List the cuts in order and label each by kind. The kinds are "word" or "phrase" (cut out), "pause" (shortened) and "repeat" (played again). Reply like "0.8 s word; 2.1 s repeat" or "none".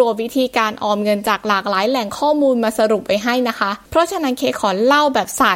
3.9 s pause